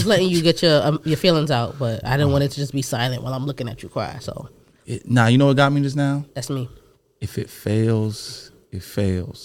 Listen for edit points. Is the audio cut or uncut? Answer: uncut